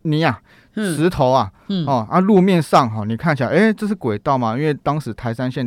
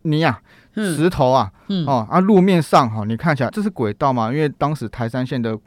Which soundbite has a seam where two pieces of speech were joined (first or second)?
second